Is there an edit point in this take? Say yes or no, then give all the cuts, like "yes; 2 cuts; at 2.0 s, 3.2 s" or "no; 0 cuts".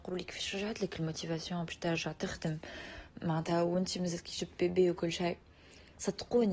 no; 0 cuts